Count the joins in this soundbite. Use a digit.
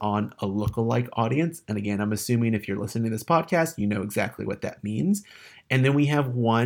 0